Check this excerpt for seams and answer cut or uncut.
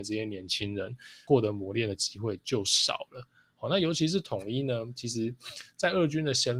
uncut